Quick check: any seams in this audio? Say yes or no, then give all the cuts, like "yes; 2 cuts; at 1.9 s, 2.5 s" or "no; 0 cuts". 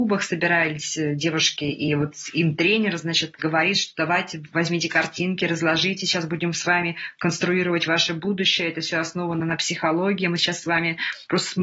no; 0 cuts